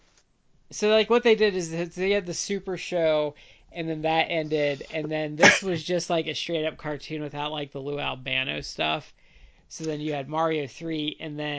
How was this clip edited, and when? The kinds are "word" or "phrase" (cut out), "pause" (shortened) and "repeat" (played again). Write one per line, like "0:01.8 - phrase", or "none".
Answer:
none